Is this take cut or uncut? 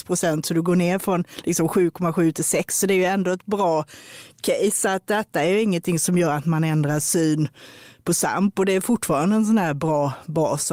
uncut